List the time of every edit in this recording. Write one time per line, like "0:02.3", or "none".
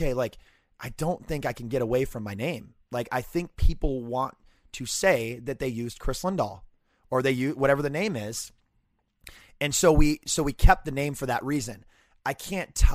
0:03.1